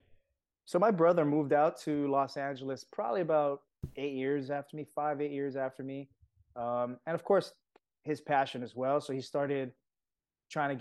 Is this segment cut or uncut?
uncut